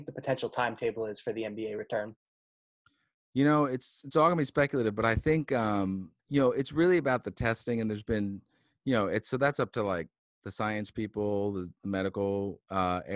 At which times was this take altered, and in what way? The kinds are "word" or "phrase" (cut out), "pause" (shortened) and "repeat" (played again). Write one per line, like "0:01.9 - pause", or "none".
0:06.2 - pause